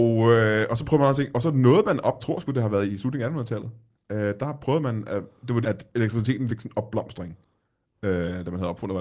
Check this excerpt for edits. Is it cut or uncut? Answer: cut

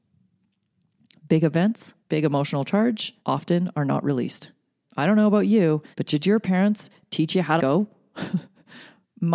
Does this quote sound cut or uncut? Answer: cut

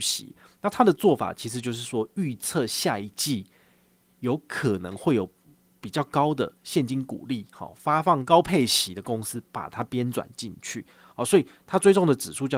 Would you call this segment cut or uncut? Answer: uncut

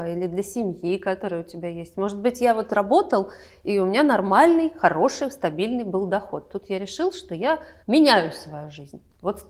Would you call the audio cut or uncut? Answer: cut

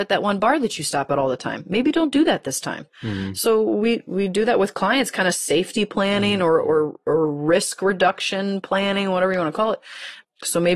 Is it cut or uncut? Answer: uncut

